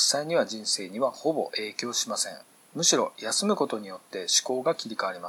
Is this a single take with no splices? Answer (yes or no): no